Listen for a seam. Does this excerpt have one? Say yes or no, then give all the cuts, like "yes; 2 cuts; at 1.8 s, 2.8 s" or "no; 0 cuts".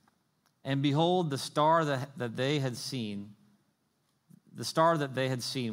no; 0 cuts